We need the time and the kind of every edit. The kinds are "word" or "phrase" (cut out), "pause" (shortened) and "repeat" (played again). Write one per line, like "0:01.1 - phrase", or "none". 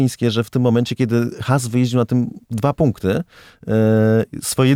none